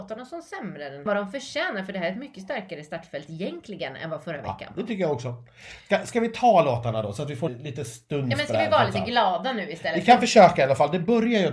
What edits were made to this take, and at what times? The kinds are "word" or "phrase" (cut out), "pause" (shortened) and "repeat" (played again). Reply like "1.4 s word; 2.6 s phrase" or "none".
1.1 s phrase; 7.5 s word